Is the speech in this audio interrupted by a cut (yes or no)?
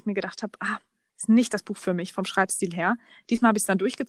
no